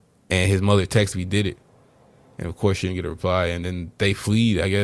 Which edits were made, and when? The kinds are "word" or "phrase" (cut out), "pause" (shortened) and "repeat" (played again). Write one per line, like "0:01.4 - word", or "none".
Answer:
0:01.1 - phrase